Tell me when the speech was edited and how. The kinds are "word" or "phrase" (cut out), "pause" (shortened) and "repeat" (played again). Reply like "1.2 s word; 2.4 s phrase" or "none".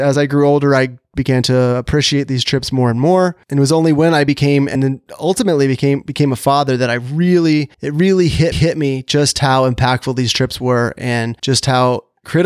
3.4 s pause; 4.7 s phrase; 7.7 s pause; 8.5 s repeat; 11.4 s pause